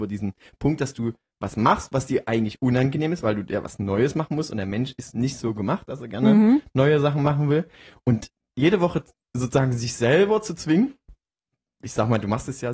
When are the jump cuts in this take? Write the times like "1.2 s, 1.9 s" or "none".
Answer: none